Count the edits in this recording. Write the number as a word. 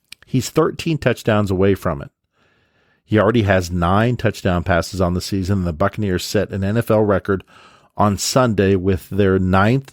zero